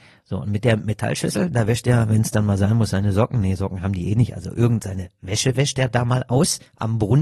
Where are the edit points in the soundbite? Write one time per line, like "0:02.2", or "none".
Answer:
none